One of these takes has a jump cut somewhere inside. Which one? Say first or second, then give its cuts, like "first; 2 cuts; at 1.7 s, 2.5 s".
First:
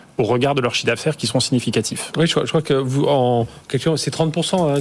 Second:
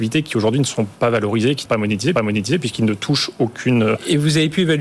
second; 2 cuts; at 1.7 s, 2.2 s